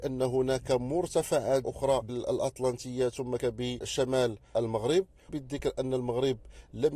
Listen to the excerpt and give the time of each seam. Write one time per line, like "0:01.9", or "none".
0:01.6
0:02.1
0:03.4
0:05.3